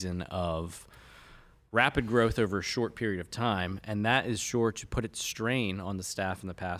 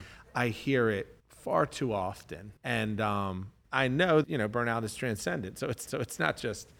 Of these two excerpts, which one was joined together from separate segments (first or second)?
second